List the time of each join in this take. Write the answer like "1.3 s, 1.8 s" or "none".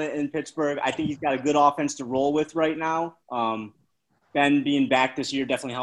3.2 s

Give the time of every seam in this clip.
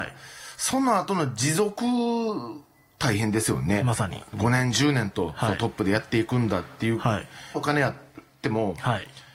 7.5 s

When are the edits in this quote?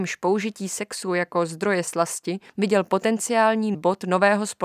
2.5 s, 3.7 s

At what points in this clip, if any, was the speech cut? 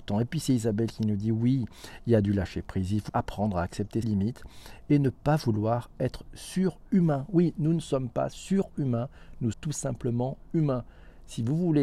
3.1 s, 4.0 s, 9.5 s

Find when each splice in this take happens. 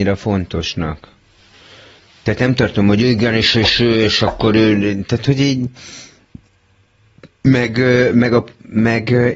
none

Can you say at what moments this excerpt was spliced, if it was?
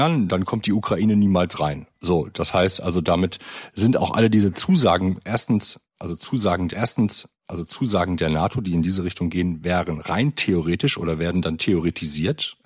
6.7 s

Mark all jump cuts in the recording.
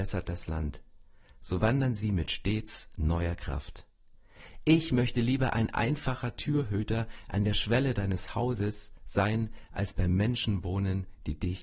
none

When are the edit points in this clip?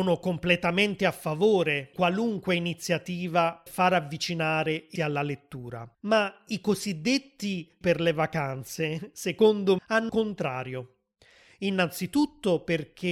1.9 s, 3.7 s, 5.0 s, 5.9 s, 7.8 s, 9.8 s, 10.1 s

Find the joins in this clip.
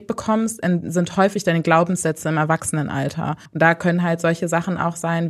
3.5 s

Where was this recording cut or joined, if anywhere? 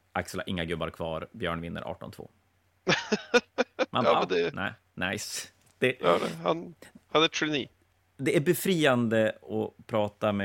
none

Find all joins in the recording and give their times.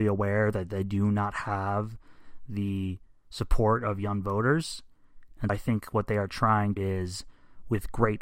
5.5 s, 6.8 s

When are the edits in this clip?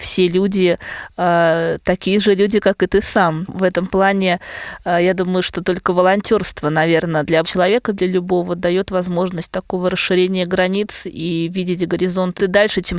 7.4 s

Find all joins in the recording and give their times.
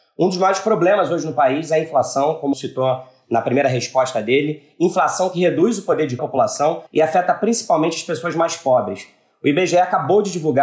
2.5 s, 6.2 s, 6.9 s

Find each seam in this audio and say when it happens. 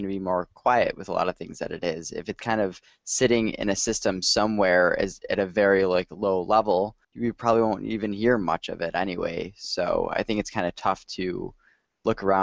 2.4 s, 7.0 s

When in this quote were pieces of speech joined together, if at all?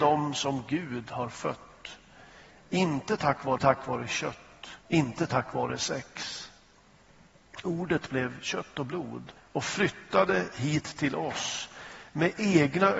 3.6 s, 4.8 s, 9.4 s

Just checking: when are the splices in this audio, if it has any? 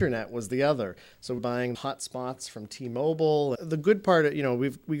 1.4 s, 1.7 s, 3.5 s

